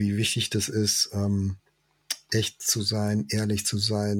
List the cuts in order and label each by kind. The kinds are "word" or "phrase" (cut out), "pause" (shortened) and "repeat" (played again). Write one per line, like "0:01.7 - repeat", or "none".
none